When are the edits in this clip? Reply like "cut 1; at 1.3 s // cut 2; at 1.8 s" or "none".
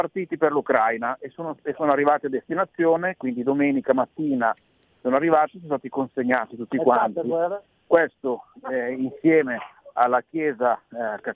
none